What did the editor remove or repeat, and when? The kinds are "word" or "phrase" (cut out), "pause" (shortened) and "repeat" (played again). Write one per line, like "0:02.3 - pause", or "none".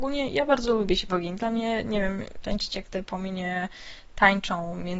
0:01.1 - word
0:02.4 - word